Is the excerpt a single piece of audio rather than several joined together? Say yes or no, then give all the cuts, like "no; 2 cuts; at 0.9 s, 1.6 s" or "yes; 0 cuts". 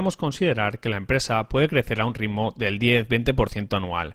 yes; 0 cuts